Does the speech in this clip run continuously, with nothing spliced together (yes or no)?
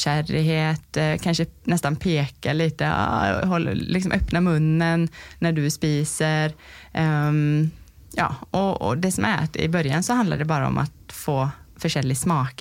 yes